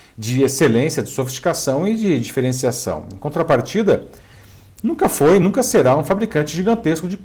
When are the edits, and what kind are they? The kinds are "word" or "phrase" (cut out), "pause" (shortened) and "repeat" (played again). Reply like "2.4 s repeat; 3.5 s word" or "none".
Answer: none